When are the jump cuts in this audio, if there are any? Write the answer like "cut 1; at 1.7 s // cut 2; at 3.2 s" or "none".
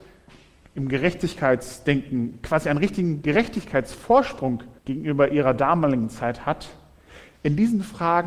cut 1; at 4.8 s